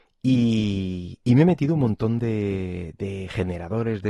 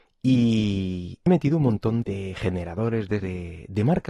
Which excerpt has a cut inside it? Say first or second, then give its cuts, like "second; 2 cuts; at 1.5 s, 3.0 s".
second; 3 cuts; at 1.3 s, 2.0 s, 3.2 s